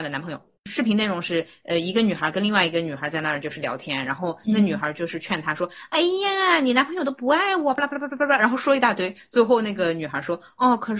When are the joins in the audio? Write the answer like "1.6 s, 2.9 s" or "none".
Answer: none